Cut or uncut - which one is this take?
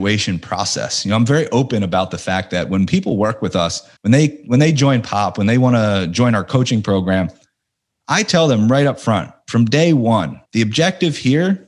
cut